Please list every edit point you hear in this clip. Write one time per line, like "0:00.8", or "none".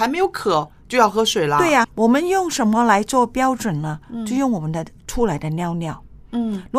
0:01.8